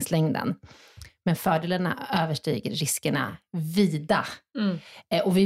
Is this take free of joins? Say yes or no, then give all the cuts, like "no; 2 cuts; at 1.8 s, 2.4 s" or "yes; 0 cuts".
yes; 0 cuts